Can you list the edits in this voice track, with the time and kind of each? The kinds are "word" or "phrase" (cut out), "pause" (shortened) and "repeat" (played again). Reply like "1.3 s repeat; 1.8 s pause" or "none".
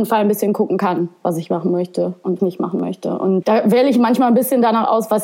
2.4 s phrase; 3.4 s word

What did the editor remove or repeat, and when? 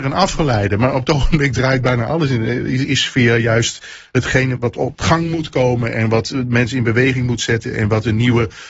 2.8 s word; 4.6 s word

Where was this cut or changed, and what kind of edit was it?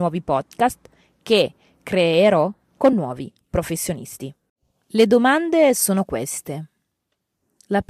none

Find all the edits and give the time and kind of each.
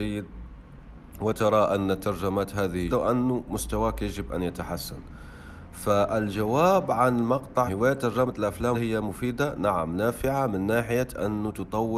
2.9 s word; 7.7 s phrase; 8.7 s phrase

